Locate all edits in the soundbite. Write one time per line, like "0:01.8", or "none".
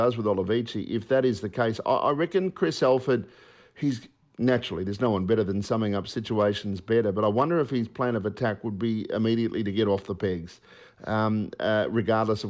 none